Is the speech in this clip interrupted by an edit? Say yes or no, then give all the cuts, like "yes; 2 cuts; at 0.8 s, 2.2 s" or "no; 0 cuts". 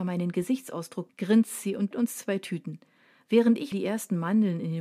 yes; 3 cuts; at 1.1 s, 1.9 s, 3.7 s